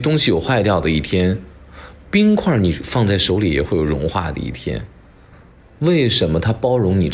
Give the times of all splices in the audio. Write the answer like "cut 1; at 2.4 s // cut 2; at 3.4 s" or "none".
none